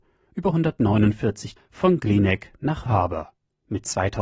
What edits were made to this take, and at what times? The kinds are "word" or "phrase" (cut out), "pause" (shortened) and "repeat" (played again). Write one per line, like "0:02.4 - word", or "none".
0:01.6 - word
0:02.9 - word